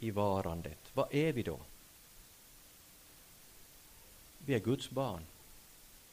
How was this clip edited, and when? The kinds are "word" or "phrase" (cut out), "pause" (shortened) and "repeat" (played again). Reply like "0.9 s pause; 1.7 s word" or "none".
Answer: none